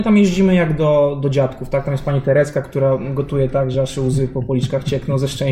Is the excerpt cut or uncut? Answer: uncut